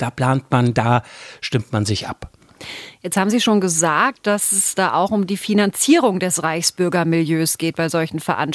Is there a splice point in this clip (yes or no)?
no